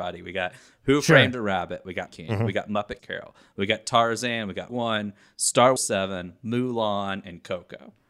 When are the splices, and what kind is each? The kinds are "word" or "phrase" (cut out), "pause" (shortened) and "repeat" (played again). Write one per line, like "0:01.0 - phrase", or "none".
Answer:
0:01.3 - word
0:02.1 - word
0:03.0 - word
0:04.7 - word
0:05.8 - word